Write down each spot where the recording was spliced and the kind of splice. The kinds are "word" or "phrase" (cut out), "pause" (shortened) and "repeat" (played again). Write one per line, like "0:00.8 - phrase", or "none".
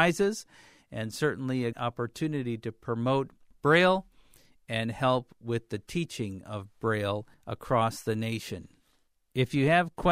0:01.7 - word
0:07.3 - pause